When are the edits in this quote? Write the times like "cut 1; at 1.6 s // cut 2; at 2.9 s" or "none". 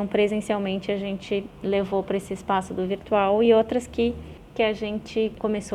none